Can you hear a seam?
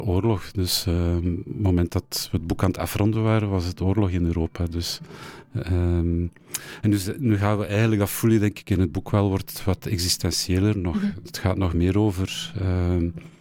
no; 0 cuts

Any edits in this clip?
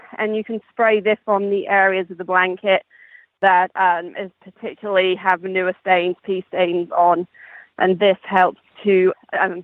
no; 0 cuts

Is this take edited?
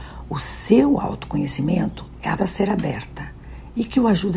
yes; 1 cut; at 2.4 s

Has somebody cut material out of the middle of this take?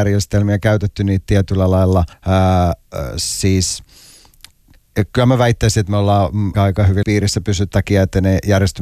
yes; 4 cuts; at 2.1 s, 6.5 s, 7.0 s, 7.7 s

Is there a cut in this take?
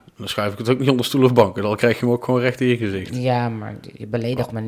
no; 0 cuts

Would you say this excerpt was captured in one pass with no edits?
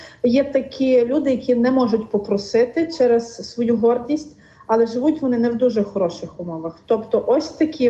yes; 0 cuts

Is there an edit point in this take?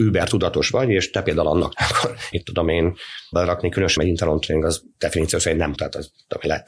yes; 5 cuts; at 1.7 s, 2.3 s, 3.3 s, 4.0 s, 5.8 s

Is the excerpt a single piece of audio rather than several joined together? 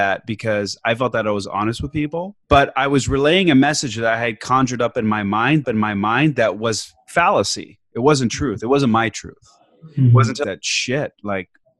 no; 4 cuts; at 1.4 s, 2.4 s, 5.6 s, 10.4 s

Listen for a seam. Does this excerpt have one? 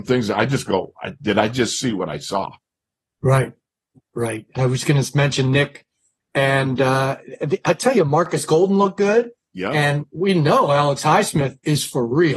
no; 0 cuts

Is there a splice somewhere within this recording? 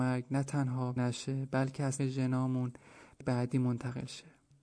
yes; 3 cuts; at 1.0 s, 2.0 s, 3.2 s

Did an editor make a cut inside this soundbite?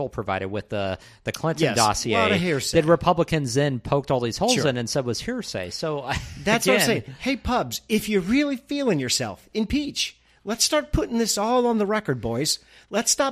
no; 0 cuts

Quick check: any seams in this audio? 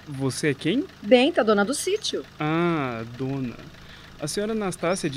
no; 0 cuts

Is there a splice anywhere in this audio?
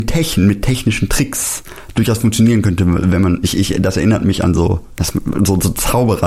no; 0 cuts

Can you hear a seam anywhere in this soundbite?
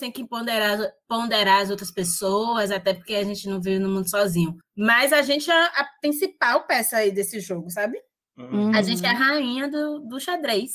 no; 0 cuts

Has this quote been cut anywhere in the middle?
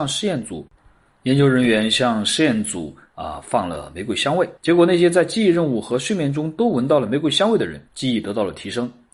yes; 2 cuts; at 4.6 s, 7.9 s

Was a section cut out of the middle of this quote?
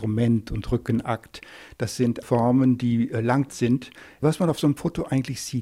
yes; 2 cuts; at 2.2 s, 3.5 s

